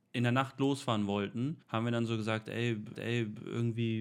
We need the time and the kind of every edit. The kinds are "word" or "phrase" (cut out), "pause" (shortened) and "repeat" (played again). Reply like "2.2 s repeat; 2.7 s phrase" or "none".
1.6 s pause; 2.9 s repeat